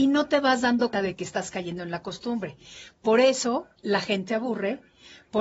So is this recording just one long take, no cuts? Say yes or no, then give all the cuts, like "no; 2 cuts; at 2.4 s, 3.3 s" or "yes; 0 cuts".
no; 3 cuts; at 0.9 s, 3.8 s, 4.3 s